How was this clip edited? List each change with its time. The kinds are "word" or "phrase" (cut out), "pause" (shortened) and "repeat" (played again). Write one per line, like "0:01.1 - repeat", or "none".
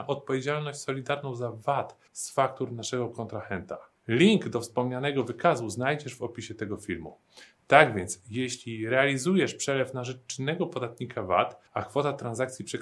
0:02.1 - pause
0:04.0 - pause
0:11.7 - pause